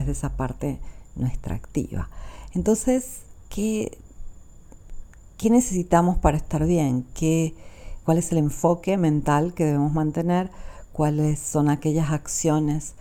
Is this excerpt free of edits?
no; 1 cut; at 8.0 s

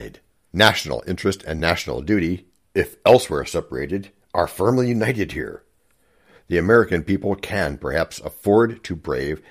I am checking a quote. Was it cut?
no; 0 cuts

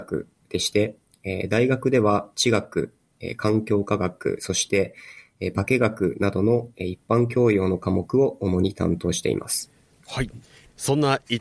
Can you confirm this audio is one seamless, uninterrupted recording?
yes; 0 cuts

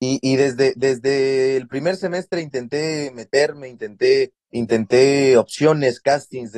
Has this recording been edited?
yes; 1 cut; at 4.4 s

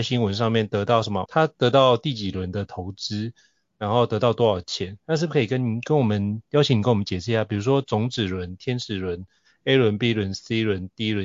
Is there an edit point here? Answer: yes; 1 cut; at 1.3 s

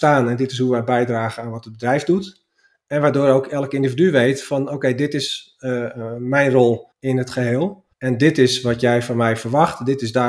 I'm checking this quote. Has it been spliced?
yes; 2 cuts; at 6.9 s, 7.9 s

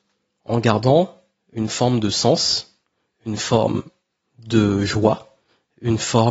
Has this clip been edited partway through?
no; 0 cuts

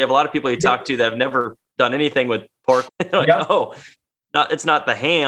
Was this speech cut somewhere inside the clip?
yes; 1 cut; at 2.9 s

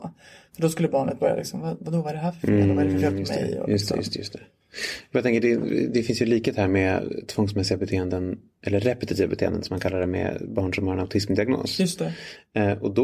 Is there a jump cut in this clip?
no; 0 cuts

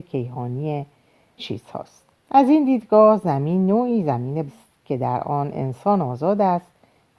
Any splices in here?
yes; 3 cuts; at 1.4 s, 2.2 s, 4.5 s

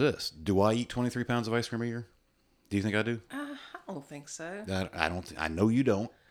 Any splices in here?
no; 0 cuts

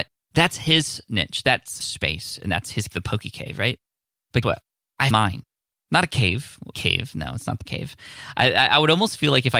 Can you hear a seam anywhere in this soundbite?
yes; 7 cuts; at 1.8 s, 2.9 s, 4.4 s, 5.1 s, 6.7 s, 7.7 s, 8.3 s

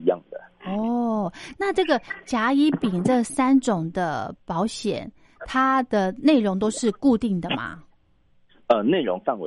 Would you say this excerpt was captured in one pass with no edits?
yes; 0 cuts

